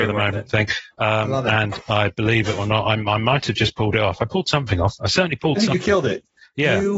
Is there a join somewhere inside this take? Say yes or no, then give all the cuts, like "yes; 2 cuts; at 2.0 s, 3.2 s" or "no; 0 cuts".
no; 0 cuts